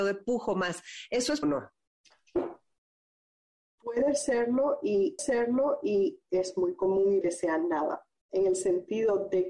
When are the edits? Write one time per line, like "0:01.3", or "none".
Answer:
0:01.4
0:05.2
0:07.2